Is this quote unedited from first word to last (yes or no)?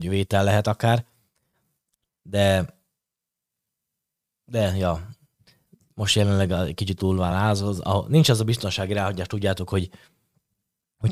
yes